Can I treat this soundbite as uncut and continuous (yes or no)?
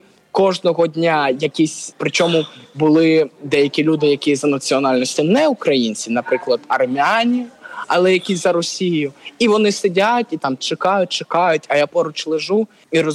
yes